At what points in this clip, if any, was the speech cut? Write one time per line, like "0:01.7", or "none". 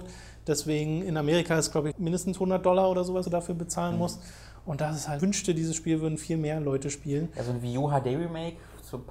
0:01.9
0:03.2
0:05.2